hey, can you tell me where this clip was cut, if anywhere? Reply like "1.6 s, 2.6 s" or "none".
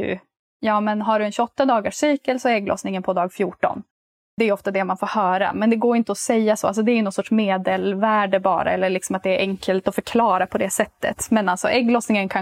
none